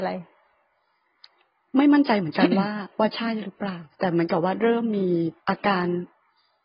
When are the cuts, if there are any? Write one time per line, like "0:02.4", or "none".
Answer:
0:05.4